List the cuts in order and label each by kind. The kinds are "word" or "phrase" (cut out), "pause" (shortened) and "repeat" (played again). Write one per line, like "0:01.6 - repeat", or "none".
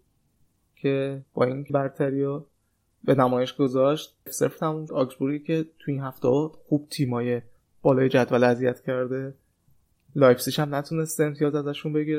0:01.7 - phrase
0:04.3 - word
0:04.9 - word